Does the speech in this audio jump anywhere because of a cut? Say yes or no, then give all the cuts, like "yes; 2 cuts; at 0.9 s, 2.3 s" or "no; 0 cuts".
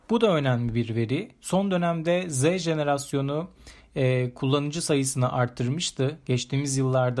no; 0 cuts